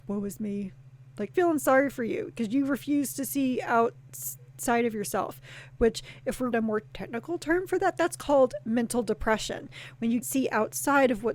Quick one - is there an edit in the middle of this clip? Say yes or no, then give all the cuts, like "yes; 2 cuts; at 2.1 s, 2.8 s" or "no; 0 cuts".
yes; 3 cuts; at 1.3 s, 6.5 s, 10.2 s